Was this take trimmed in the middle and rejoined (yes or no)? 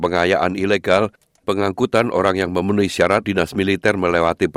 yes